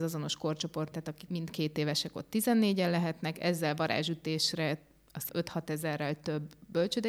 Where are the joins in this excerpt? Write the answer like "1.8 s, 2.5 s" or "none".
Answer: 0.9 s, 1.3 s, 5.3 s